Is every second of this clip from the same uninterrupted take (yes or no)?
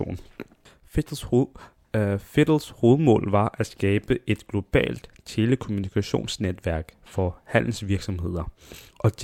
yes